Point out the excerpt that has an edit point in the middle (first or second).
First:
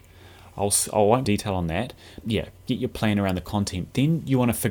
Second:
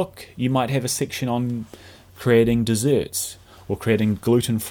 first